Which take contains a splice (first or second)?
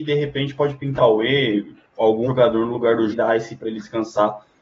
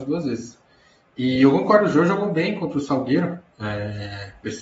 first